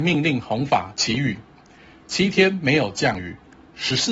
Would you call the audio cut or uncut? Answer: uncut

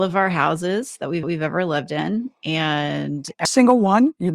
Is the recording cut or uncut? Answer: cut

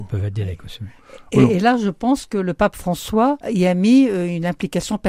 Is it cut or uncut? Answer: cut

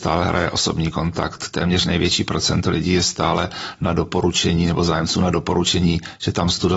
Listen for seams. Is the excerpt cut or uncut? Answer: uncut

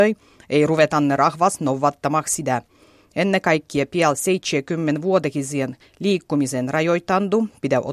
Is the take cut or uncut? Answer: uncut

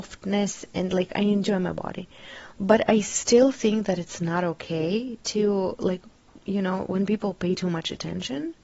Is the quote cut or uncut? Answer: cut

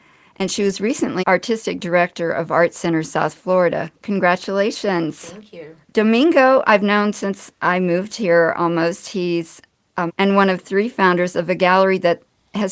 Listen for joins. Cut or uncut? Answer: cut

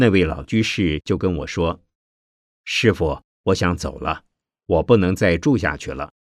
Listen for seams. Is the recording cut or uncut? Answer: uncut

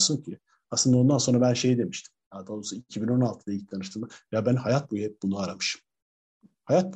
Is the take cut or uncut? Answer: uncut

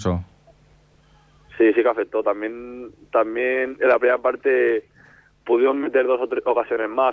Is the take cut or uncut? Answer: uncut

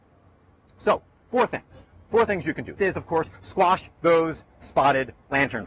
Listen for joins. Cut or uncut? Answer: cut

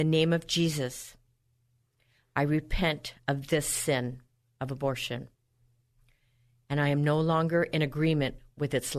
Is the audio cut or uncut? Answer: uncut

